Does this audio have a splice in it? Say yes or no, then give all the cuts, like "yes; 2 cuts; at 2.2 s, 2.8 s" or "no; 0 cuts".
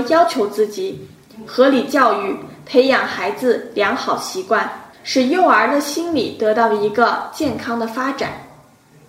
yes; 1 cut; at 4.9 s